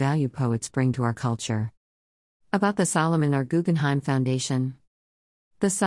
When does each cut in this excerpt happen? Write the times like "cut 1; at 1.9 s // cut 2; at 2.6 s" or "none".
none